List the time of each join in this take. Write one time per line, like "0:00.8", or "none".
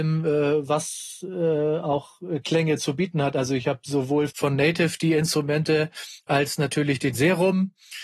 0:04.3
0:07.1